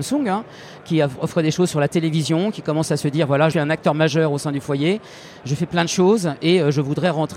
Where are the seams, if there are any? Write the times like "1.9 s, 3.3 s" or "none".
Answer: 3.5 s